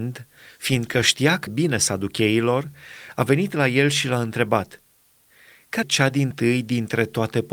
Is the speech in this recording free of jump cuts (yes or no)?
no